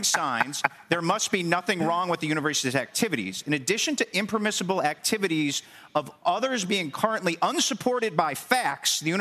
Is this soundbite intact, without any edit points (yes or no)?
yes